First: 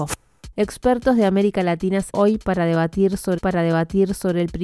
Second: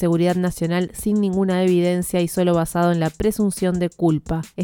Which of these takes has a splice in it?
first; 2 cuts; at 2.1 s, 3.4 s

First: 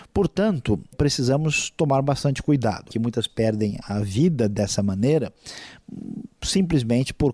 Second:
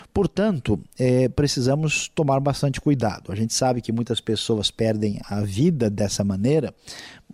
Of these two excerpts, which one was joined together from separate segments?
first; 3 cuts; at 0.9 s, 2.9 s, 3.3 s

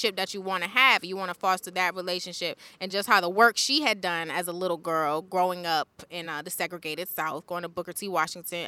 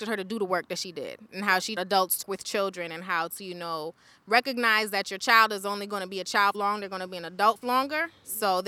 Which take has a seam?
second; 4 cuts; at 1.8 s, 2.2 s, 6.5 s, 7.6 s

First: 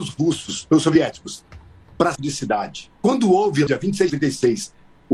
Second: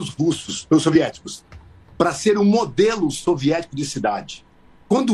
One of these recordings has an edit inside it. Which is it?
first; 4 cuts; at 2.2 s, 3.0 s, 3.7 s, 4.1 s

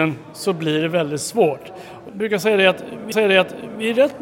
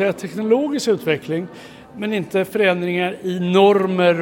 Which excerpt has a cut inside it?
first; 2 cuts; at 2.1 s, 3.1 s

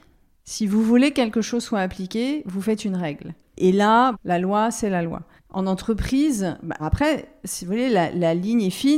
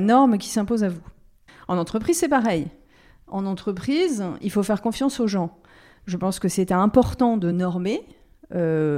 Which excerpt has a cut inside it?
first; 3 cuts; at 4.1 s, 5.4 s, 6.8 s

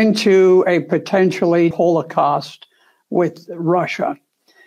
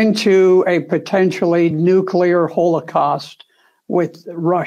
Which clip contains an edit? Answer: first; 1 cut; at 1.7 s

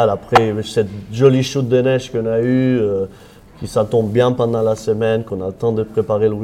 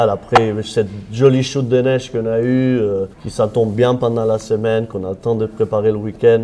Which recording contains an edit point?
second; 1 cut; at 3.1 s

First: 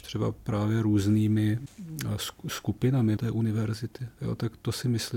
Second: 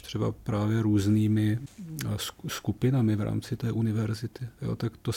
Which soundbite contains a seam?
first; 1 cut; at 3.2 s

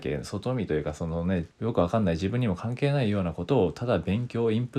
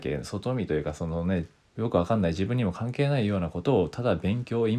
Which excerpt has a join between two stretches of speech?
first; 1 cut; at 1.5 s

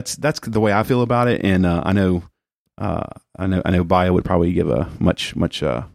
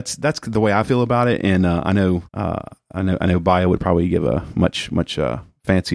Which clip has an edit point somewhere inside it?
second; 1 cut; at 2.3 s

